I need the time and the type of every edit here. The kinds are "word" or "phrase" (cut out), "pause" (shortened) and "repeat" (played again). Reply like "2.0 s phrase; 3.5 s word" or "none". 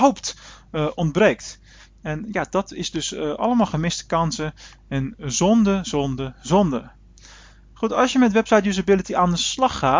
none